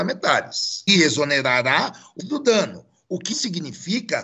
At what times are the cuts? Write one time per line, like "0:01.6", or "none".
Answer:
0:01.0
0:02.2
0:03.3